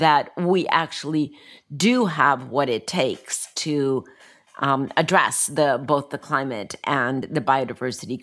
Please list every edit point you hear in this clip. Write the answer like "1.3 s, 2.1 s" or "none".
none